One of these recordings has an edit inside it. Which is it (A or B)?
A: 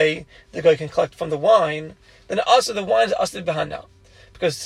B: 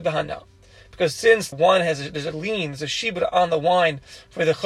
B